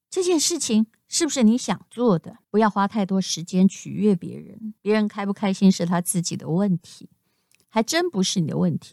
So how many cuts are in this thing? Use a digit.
2